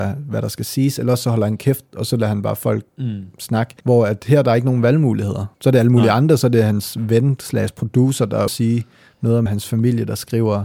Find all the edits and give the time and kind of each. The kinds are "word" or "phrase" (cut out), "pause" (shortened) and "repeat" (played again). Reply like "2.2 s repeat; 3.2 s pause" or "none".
2.9 s pause; 3.8 s pause; 5.5 s pause; 8.5 s phrase; 9.5 s phrase